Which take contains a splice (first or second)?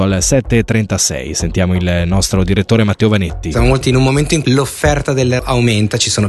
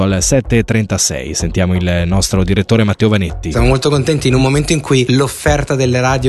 first